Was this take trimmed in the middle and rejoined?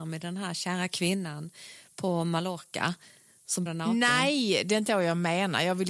yes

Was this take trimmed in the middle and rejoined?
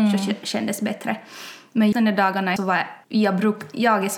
yes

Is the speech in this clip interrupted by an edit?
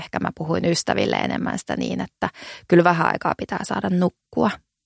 no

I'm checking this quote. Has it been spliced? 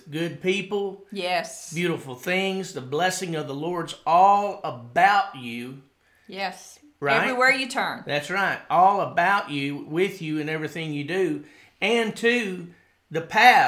no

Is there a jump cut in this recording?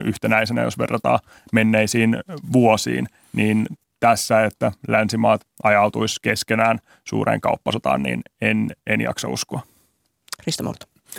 no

